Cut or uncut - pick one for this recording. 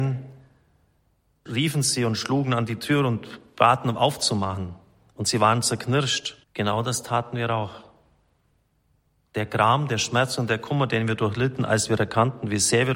cut